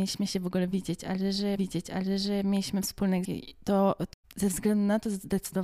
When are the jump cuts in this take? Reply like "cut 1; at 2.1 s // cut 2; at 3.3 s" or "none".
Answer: cut 1; at 1.6 s // cut 2; at 3.2 s